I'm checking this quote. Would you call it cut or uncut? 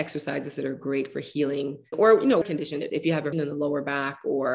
cut